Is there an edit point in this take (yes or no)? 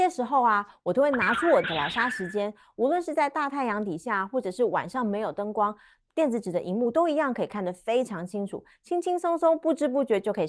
yes